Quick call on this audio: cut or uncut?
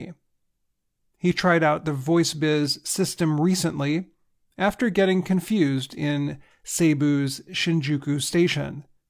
uncut